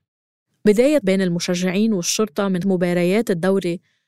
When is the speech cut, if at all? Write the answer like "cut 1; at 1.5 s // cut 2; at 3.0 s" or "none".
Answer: cut 1; at 1.0 s // cut 2; at 2.6 s